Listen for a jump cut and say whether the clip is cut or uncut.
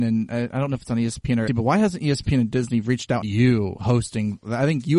cut